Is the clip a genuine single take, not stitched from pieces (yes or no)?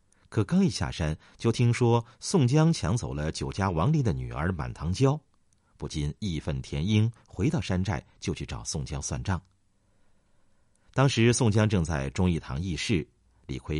yes